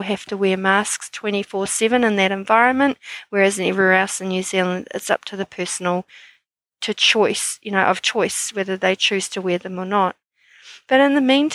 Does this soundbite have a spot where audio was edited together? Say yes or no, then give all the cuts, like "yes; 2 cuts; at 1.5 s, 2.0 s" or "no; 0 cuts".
no; 0 cuts